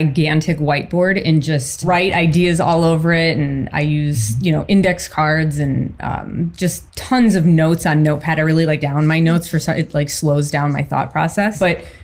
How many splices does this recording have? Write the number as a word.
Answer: two